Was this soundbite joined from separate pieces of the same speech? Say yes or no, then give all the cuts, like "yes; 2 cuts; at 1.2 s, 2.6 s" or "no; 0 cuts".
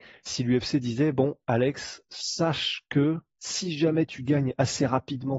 yes; 1 cut; at 2.0 s